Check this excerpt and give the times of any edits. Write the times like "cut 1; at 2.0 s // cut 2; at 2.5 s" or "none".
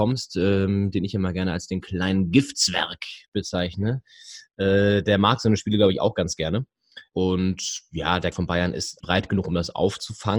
cut 1; at 8.3 s // cut 2; at 9.0 s